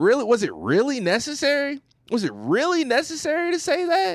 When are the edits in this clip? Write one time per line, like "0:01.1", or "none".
0:02.0